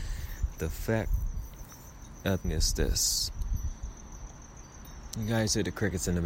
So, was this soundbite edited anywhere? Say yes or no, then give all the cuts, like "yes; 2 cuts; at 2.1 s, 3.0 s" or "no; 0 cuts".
yes; 1 cut; at 2.4 s